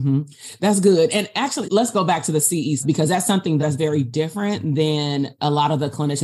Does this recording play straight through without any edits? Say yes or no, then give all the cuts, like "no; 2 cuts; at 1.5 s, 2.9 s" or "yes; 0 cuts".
no; 3 cuts; at 1.6 s, 2.8 s, 3.6 s